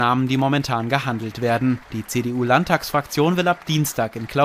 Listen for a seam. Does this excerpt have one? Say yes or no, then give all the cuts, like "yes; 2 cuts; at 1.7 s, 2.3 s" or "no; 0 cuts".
yes; 1 cut; at 1.8 s